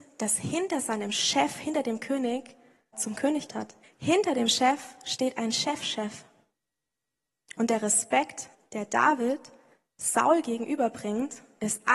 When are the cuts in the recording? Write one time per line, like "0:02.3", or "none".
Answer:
0:02.9
0:03.5
0:03.8
0:08.5